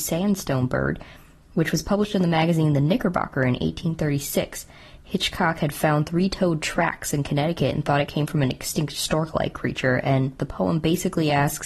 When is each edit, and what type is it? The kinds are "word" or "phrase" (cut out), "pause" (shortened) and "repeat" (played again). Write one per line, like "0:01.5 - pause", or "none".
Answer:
none